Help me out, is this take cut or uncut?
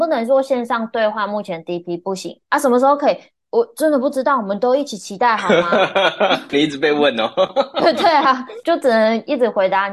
uncut